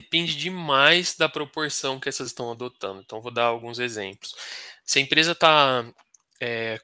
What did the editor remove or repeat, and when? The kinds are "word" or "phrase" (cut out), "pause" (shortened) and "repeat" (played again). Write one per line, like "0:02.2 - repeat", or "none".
0:02.3 - word